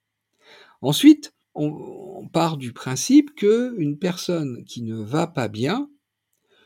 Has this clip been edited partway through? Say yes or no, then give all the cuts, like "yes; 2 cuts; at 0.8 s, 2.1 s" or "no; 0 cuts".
yes; 1 cut; at 1.4 s